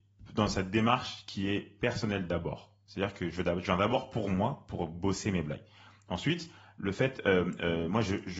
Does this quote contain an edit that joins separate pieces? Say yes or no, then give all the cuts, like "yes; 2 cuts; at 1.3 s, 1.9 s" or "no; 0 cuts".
no; 0 cuts